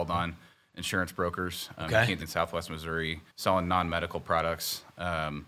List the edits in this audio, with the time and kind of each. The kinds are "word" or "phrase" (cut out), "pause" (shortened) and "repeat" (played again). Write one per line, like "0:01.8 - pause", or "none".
0:02.2 - word
0:03.3 - pause